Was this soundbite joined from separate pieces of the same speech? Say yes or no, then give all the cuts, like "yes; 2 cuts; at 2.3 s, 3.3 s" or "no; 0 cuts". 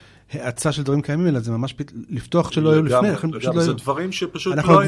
yes; 1 cut; at 2.5 s